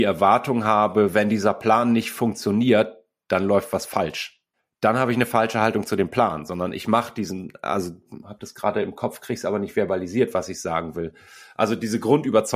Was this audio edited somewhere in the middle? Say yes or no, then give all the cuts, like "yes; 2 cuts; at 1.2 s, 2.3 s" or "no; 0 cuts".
yes; 2 cuts; at 4.5 s, 8.2 s